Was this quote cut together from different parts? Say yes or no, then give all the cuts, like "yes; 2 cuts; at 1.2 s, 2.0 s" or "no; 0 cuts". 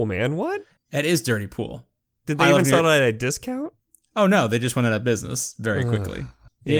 no; 0 cuts